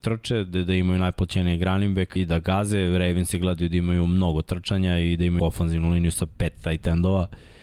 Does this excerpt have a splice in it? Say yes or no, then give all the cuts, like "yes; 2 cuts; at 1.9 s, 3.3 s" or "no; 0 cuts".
yes; 2 cuts; at 2.2 s, 5.4 s